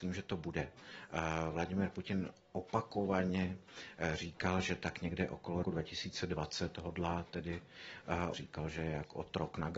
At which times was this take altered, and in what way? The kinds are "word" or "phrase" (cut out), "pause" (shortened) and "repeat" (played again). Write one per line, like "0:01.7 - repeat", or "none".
0:05.6 - word
0:08.3 - phrase